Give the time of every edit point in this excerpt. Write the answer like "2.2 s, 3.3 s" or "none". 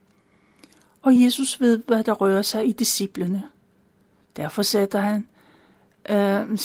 none